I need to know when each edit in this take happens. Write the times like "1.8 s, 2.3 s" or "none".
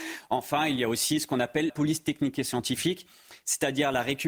1.7 s